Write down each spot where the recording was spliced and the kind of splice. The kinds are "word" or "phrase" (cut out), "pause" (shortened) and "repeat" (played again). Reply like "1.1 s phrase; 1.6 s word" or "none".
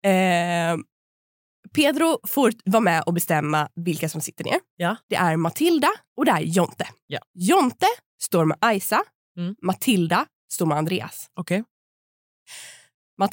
5.0 s pause; 6.1 s pause; 7.2 s pause